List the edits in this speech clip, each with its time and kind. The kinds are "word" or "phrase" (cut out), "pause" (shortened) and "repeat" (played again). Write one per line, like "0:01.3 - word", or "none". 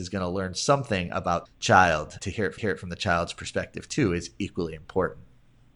0:01.5 - phrase
0:02.2 - word
0:02.6 - repeat